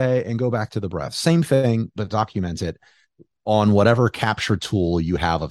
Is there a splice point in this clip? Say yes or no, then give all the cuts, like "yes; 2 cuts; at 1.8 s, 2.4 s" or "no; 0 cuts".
no; 0 cuts